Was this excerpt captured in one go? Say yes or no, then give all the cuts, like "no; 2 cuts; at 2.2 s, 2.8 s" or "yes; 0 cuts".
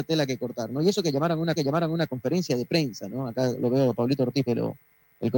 no; 2 cuts; at 1.6 s, 4.5 s